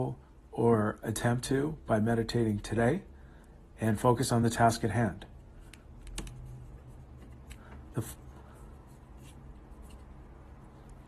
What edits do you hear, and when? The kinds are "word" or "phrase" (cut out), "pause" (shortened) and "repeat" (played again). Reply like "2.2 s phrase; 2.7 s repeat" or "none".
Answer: none